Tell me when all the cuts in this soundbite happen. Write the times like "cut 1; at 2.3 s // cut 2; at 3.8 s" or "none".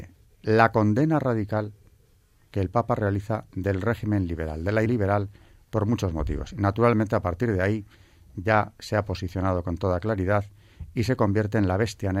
cut 1; at 4.9 s